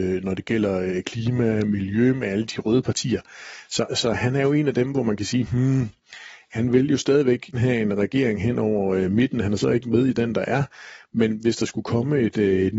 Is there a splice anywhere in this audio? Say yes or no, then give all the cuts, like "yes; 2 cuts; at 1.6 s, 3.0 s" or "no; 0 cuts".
yes; 2 cuts; at 3.9 s, 7.5 s